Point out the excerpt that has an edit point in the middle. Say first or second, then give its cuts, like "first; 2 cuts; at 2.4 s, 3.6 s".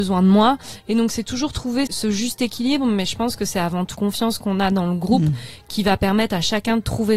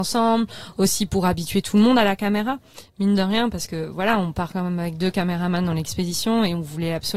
first; 2 cuts; at 1.9 s, 3.9 s